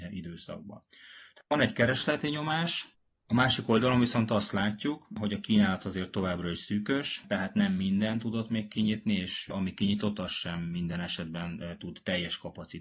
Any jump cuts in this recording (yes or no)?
no